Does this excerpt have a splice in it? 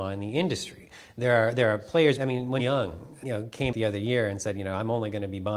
yes; 4 cuts; at 2.2 s, 2.6 s, 3.2 s, 3.7 s

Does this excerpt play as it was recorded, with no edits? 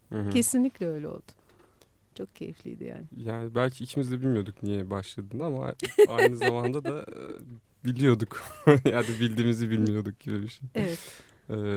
yes; 0 cuts

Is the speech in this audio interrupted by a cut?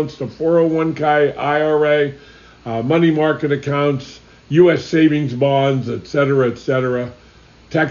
no; 0 cuts

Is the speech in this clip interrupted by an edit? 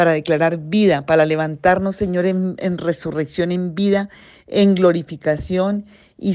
no; 0 cuts

